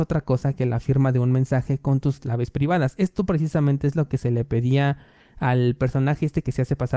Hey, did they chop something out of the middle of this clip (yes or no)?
no